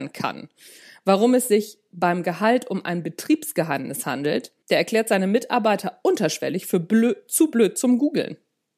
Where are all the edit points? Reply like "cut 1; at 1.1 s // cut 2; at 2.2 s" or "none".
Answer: cut 1; at 4.6 s